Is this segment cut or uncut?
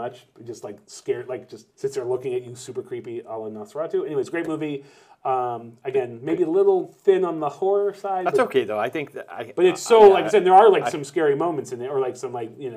cut